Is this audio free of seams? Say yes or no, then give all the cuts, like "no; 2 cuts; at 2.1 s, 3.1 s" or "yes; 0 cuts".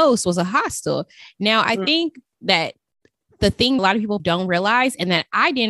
no; 2 cuts; at 3.8 s, 4.2 s